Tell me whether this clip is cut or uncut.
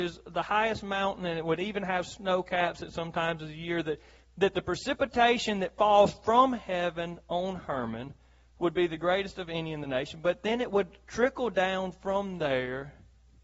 uncut